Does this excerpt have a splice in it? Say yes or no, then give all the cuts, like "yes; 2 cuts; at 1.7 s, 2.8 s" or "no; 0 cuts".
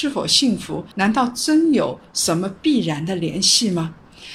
yes; 1 cut; at 0.9 s